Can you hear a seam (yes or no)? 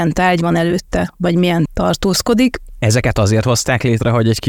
yes